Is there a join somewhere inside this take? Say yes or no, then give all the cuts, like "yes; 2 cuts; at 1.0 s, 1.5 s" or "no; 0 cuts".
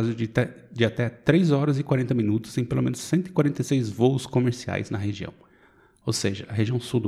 no; 0 cuts